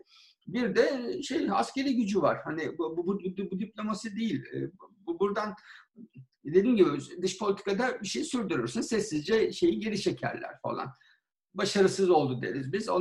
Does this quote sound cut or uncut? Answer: uncut